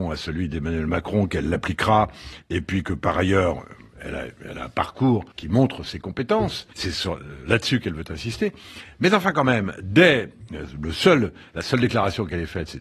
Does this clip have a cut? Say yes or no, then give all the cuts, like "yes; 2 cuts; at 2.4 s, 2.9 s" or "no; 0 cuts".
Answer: yes; 2 cuts; at 5.3 s, 6.7 s